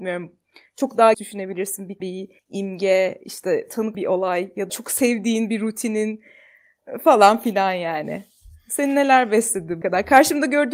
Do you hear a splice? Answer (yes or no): yes